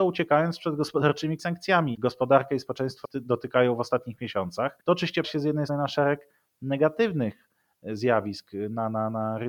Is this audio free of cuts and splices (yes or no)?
no